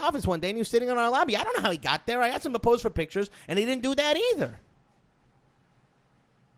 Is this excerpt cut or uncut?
uncut